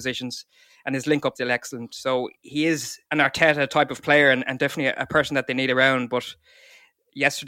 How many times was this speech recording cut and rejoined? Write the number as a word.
three